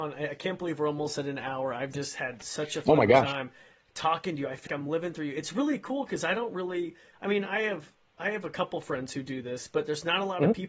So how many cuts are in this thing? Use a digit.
1